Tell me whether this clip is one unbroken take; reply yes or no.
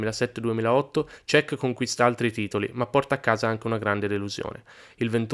yes